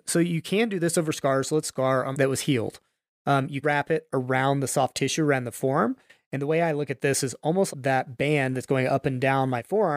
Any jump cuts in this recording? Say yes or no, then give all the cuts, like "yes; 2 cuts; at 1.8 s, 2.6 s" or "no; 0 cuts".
yes; 4 cuts; at 1.6 s, 2.1 s, 3.6 s, 7.7 s